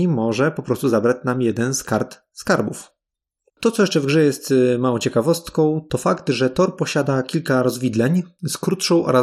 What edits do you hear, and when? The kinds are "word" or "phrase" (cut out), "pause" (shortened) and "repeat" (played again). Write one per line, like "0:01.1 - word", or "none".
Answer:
none